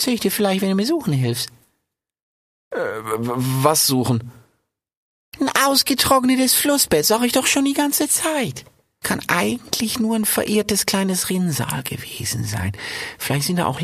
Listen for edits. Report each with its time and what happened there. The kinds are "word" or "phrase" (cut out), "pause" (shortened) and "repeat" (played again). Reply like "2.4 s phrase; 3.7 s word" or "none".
9.0 s word